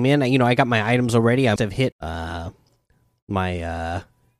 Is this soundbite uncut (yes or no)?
no